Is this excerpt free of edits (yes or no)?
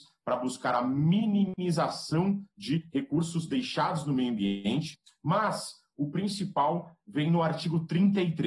yes